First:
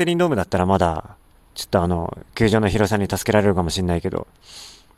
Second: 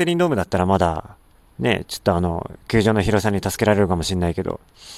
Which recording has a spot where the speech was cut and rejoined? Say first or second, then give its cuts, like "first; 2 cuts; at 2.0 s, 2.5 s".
first; 1 cut; at 1.5 s